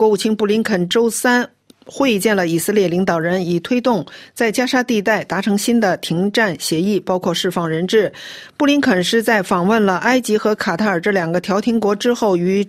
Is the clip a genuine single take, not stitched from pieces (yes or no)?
yes